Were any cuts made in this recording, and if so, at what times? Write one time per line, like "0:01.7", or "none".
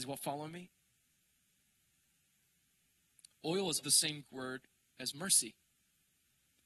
0:03.8
0:04.2